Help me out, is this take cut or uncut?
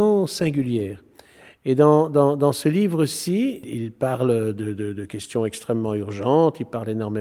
uncut